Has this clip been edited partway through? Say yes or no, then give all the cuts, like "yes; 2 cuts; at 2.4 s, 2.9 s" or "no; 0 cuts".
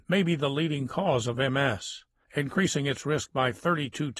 no; 0 cuts